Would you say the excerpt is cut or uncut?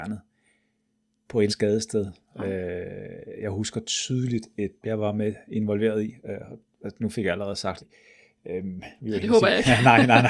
cut